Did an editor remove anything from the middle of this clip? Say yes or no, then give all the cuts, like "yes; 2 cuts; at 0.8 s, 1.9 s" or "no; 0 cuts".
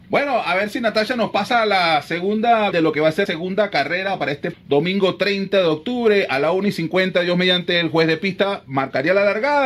yes; 3 cuts; at 2.7 s, 3.3 s, 4.5 s